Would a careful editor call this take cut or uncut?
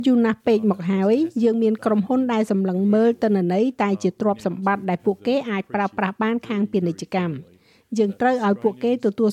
uncut